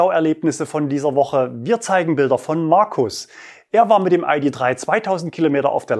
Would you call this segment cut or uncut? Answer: uncut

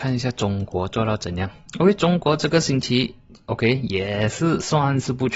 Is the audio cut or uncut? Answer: uncut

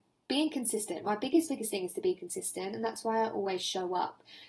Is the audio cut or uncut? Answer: uncut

